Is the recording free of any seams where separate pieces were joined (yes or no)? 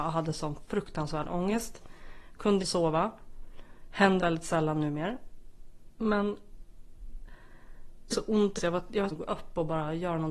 no